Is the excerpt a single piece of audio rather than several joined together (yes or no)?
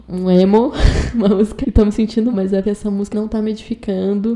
no